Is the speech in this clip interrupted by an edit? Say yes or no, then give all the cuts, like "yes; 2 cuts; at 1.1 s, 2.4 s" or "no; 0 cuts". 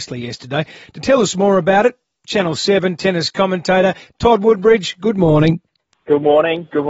no; 0 cuts